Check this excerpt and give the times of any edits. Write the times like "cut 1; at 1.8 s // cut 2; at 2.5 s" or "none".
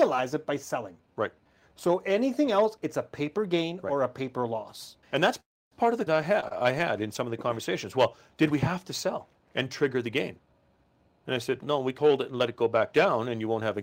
cut 1; at 1.5 s // cut 2; at 5.0 s // cut 3; at 6.1 s // cut 4; at 9.4 s // cut 5; at 11.6 s // cut 6; at 12.0 s